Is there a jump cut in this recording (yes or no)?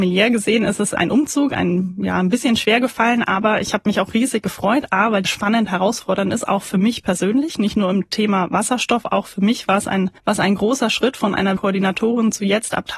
yes